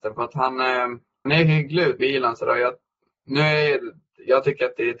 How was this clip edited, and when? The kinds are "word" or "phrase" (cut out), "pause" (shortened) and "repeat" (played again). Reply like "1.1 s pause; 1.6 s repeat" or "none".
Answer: 1.3 s word; 2.0 s word